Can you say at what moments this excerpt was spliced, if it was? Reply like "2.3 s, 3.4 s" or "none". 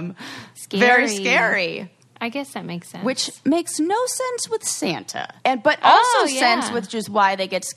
2.0 s, 5.4 s